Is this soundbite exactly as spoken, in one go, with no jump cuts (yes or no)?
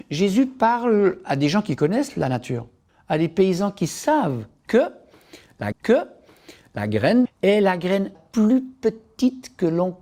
no